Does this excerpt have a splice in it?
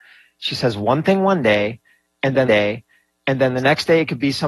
yes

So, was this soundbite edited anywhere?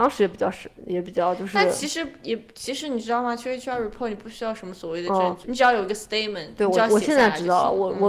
yes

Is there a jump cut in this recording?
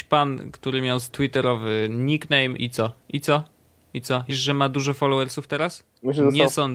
yes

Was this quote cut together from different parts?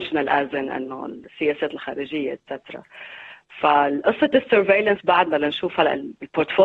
no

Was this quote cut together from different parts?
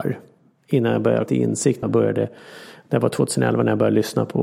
yes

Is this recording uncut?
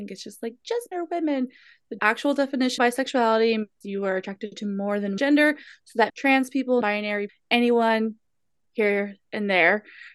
no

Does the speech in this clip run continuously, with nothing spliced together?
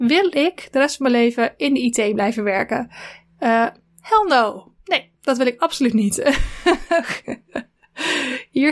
yes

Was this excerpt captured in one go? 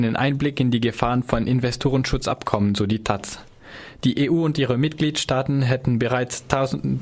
yes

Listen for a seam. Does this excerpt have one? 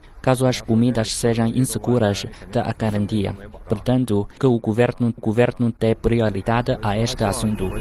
yes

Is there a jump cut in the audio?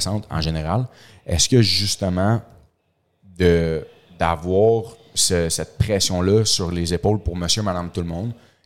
no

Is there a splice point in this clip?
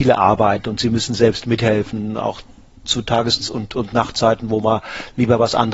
no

